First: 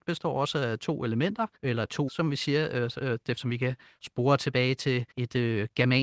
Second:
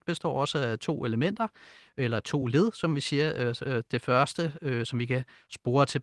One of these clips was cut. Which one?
first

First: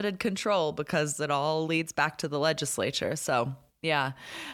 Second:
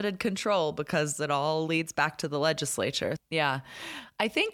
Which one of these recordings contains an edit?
second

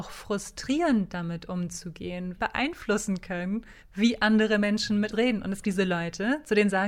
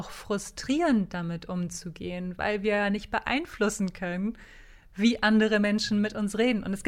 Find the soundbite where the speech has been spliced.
first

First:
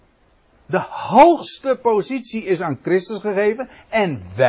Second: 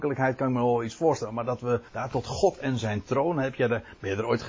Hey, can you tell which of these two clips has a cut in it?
second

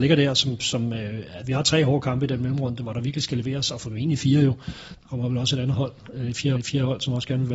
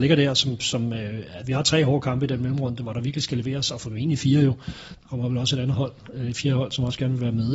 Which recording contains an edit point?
first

